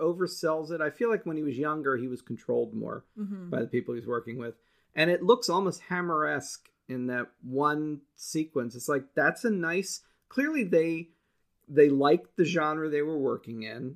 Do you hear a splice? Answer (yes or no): no